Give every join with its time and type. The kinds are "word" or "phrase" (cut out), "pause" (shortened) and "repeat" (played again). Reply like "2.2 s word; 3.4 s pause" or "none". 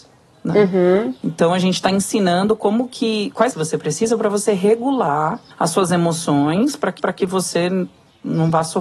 3.5 s phrase; 5.5 s pause; 7.0 s repeat